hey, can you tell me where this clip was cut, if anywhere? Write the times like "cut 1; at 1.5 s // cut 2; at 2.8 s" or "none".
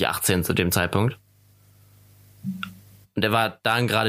none